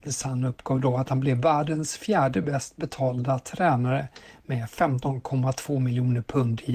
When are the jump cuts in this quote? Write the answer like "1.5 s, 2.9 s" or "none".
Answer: none